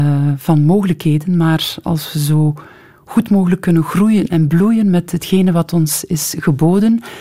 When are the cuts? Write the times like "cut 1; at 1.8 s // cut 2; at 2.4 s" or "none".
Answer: none